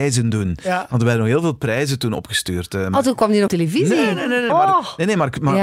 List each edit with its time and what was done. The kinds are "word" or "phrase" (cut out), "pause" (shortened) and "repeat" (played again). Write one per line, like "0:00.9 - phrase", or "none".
0:03.5 - phrase
0:04.5 - word